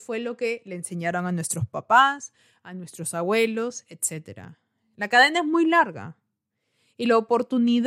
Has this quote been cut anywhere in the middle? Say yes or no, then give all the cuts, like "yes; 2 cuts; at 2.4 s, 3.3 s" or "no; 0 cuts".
no; 0 cuts